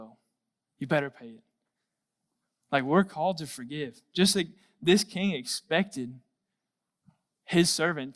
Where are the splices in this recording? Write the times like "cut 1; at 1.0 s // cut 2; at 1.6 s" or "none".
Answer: none